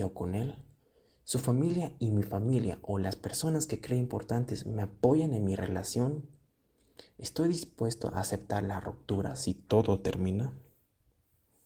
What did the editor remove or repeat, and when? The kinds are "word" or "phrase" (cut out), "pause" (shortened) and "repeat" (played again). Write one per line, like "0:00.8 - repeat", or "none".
none